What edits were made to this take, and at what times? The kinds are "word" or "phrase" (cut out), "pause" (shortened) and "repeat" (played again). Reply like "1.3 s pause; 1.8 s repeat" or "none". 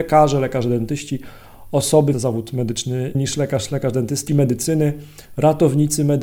2.1 s word; 3.1 s word; 4.3 s word